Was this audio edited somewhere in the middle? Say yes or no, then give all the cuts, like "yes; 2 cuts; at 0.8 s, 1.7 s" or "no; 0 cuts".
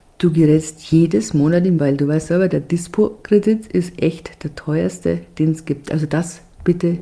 yes; 1 cut; at 1.8 s